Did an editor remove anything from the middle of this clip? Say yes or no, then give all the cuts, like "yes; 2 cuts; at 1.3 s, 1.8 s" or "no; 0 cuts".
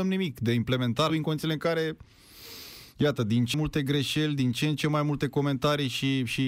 yes; 2 cuts; at 1.1 s, 3.5 s